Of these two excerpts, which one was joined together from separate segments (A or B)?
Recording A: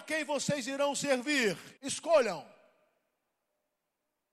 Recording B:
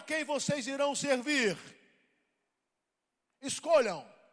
A